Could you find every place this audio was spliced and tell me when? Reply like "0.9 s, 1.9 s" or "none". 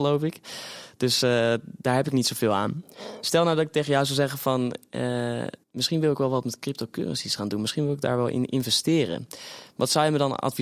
5.6 s